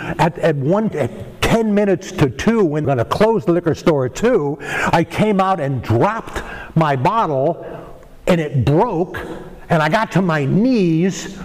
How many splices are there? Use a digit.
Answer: 2